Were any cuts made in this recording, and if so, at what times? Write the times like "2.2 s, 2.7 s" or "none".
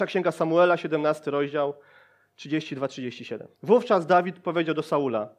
3.5 s